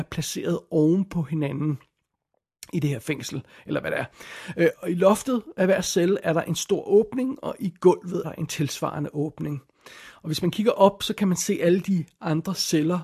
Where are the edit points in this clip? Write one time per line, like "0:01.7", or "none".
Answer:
0:04.7
0:08.2